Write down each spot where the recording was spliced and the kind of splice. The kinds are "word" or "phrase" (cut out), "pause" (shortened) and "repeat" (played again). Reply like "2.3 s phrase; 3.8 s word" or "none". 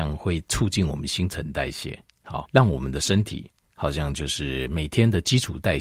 2.4 s word